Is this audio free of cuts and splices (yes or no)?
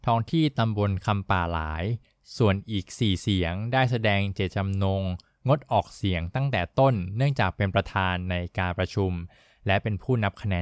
yes